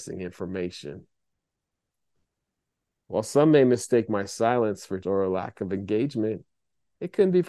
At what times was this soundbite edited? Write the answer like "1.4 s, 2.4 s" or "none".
5.0 s

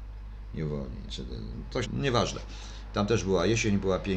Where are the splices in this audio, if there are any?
1.1 s, 1.9 s

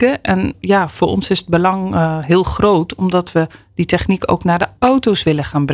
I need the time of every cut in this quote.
none

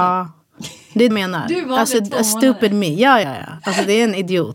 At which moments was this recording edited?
1.1 s, 3.2 s

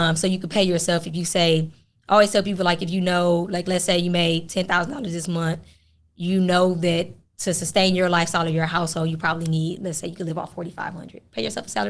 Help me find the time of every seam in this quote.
none

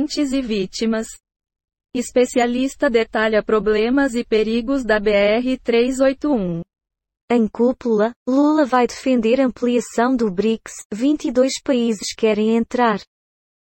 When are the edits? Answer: none

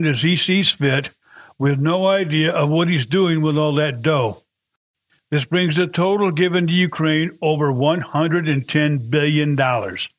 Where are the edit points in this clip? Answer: none

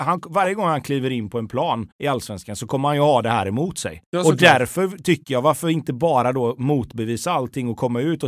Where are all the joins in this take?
1.9 s, 4.1 s

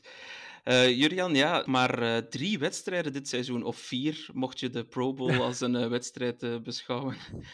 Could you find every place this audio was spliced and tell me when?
1.7 s

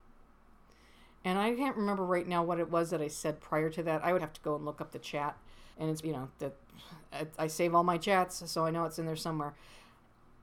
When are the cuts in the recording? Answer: 4.2 s, 5.7 s, 6.0 s

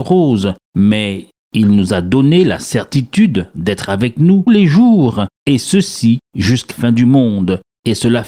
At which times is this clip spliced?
4.5 s, 6.7 s

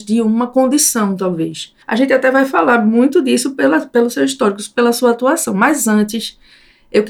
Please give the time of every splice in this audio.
1.8 s

